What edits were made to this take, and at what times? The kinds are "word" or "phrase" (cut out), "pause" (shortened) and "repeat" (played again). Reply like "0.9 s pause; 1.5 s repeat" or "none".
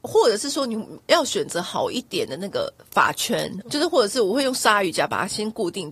3.6 s word

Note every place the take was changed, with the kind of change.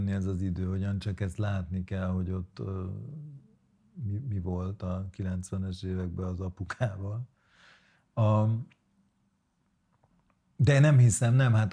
none

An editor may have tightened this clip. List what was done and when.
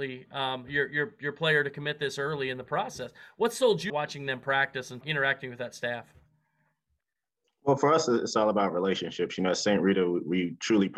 3.9 s word; 5.0 s word

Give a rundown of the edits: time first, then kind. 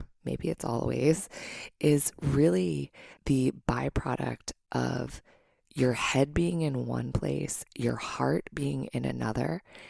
3.2 s pause

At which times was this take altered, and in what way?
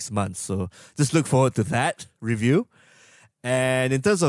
none

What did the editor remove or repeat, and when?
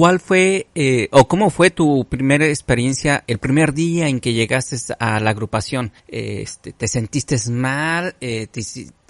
3.3 s word; 6.0 s pause

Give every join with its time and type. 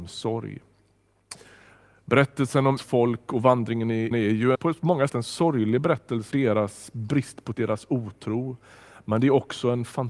2.8 s word; 4.1 s word; 4.5 s word; 5.1 s word; 6.3 s word; 7.5 s word

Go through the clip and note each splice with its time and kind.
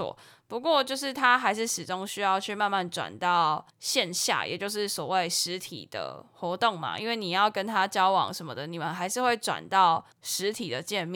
3.7 s pause; 10.1 s pause

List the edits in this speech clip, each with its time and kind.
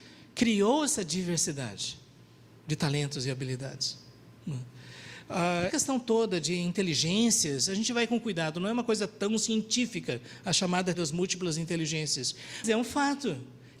5.7 s word; 10.9 s word; 12.6 s word

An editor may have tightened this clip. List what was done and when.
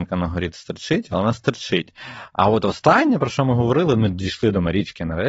none

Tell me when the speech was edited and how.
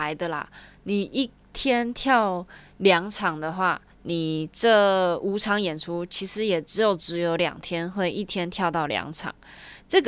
3.9 s pause

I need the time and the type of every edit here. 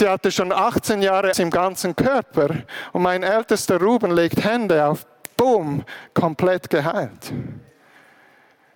1.3 s word

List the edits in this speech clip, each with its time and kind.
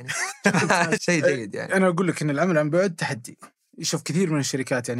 1.0 s word

